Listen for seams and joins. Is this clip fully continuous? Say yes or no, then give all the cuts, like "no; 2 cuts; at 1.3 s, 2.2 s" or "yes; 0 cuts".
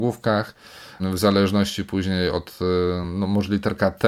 yes; 0 cuts